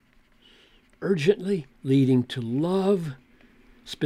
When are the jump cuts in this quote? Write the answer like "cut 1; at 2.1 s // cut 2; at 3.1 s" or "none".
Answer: cut 1; at 1.8 s